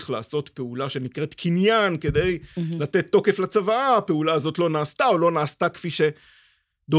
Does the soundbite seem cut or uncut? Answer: uncut